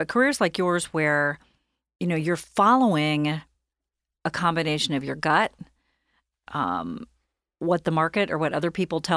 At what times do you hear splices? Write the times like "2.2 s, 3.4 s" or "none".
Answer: none